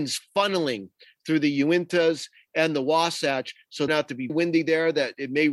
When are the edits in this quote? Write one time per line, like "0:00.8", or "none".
0:03.9
0:04.3